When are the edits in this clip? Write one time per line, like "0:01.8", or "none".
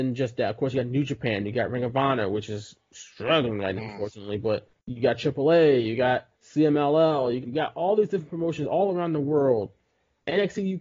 0:03.8
0:06.3
0:07.4